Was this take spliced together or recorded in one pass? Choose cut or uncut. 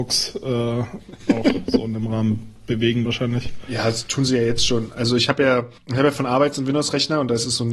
cut